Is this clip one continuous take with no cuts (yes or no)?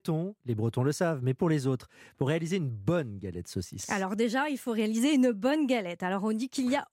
yes